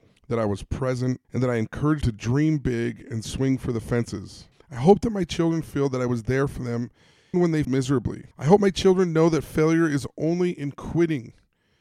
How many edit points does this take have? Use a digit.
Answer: 6